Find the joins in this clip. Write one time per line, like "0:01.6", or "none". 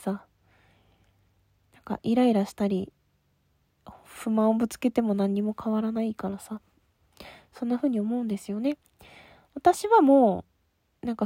none